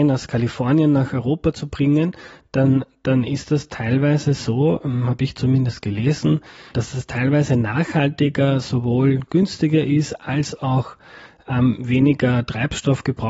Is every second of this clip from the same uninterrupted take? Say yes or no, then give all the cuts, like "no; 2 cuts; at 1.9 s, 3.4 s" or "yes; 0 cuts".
no; 1 cut; at 6.7 s